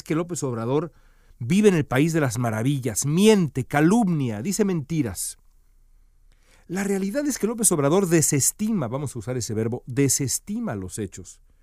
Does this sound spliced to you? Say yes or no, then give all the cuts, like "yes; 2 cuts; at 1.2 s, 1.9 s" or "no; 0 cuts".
no; 0 cuts